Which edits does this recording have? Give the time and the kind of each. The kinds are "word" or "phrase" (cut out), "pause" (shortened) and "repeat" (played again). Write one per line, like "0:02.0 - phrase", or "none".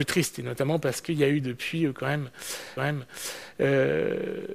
0:02.8 - repeat